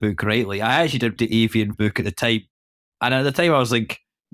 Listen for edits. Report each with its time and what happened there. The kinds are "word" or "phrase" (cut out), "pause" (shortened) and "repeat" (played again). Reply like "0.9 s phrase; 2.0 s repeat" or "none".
1.2 s word; 1.7 s word